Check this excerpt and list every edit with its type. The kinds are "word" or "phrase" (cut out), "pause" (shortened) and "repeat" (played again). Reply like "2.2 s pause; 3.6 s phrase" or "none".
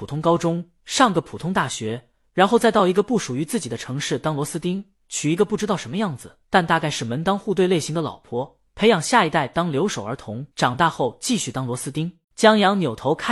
6.4 s pause; 10.5 s pause; 12.2 s pause